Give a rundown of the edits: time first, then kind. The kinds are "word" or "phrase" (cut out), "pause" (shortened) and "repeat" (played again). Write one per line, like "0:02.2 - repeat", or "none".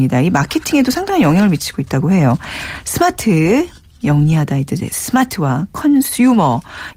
none